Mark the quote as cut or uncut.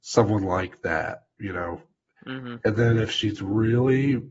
uncut